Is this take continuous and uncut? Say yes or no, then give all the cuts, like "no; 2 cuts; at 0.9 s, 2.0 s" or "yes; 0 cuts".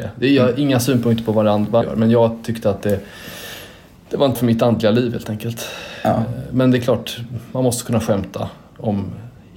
no; 2 cuts; at 1.8 s, 4.4 s